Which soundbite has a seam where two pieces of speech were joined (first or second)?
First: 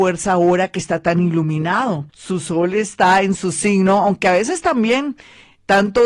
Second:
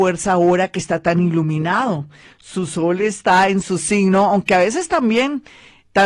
first